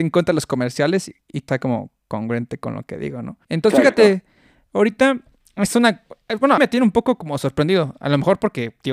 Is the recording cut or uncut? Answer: cut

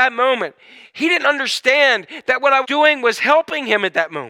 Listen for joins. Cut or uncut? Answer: cut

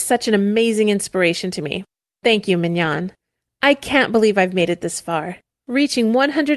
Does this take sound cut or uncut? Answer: uncut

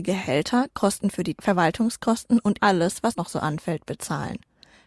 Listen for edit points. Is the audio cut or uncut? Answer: cut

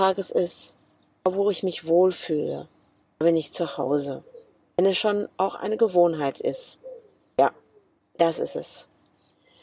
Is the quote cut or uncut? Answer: uncut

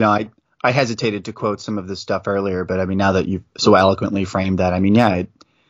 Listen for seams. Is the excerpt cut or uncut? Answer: cut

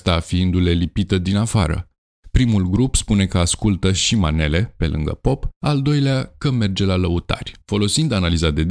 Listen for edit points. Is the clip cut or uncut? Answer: cut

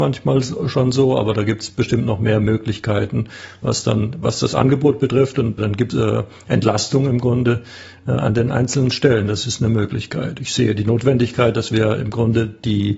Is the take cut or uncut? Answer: cut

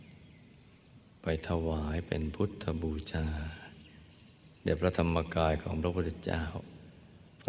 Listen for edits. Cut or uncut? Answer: cut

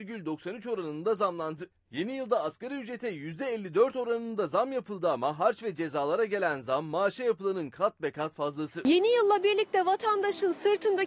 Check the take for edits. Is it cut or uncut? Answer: uncut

